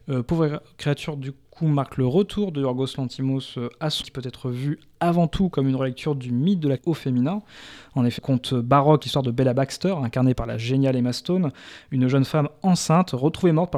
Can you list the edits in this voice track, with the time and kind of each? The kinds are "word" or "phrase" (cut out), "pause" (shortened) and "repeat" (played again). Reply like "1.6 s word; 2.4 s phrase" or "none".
4.0 s phrase; 6.8 s phrase; 8.2 s word; 9.0 s phrase